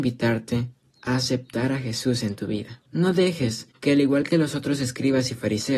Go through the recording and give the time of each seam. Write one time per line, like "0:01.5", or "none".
0:02.9
0:03.7